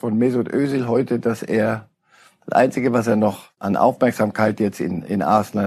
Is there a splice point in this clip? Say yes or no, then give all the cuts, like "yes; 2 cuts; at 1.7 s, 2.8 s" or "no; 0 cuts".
no; 0 cuts